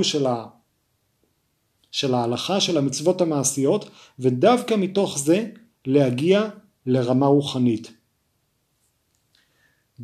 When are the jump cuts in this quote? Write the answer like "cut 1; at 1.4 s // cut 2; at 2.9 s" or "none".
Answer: none

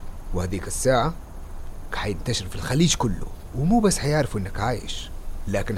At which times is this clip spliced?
cut 1; at 1.9 s

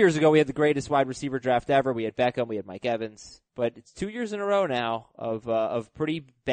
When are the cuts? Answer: cut 1; at 3.5 s

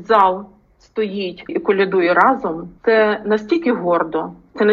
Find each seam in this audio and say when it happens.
cut 1; at 1.5 s // cut 2; at 2.8 s

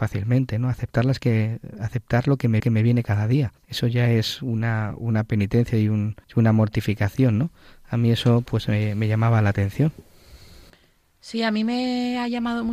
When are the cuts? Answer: cut 1; at 2.6 s // cut 2; at 3.6 s // cut 3; at 6.2 s

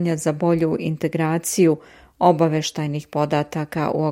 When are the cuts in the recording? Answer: none

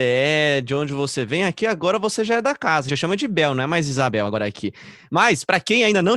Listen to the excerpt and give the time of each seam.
cut 1; at 2.9 s

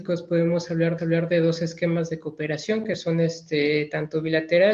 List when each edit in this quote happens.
cut 1; at 1.0 s

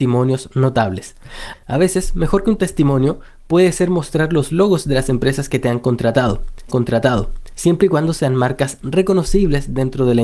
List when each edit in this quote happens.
cut 1; at 6.7 s

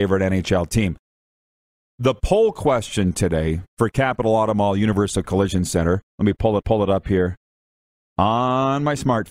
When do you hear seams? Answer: cut 1; at 3.7 s // cut 2; at 6.1 s // cut 3; at 6.6 s

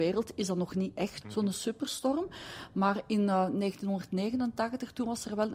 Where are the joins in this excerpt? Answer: cut 1; at 1.2 s // cut 2; at 1.5 s

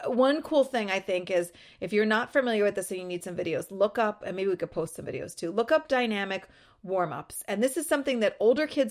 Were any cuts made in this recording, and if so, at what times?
none

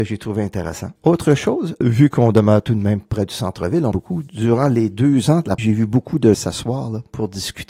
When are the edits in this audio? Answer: cut 1; at 1.0 s // cut 2; at 1.8 s // cut 3; at 3.9 s // cut 4; at 5.6 s // cut 5; at 6.3 s

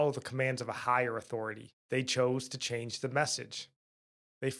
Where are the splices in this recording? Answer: cut 1; at 1.8 s

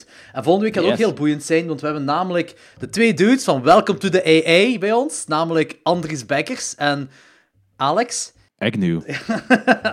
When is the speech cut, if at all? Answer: none

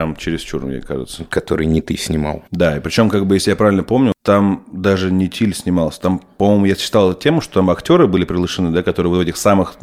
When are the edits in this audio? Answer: cut 1; at 2.5 s

